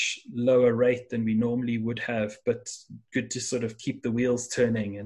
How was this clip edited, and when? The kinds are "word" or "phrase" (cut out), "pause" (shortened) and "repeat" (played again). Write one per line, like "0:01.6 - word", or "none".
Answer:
none